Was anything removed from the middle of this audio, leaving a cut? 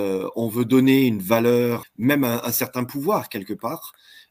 yes; 1 cut; at 1.8 s

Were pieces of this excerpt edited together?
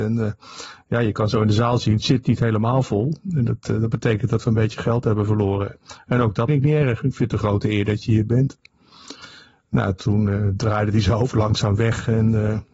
yes; 1 cut; at 6.5 s

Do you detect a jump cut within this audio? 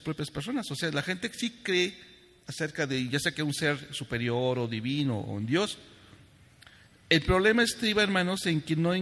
no; 0 cuts

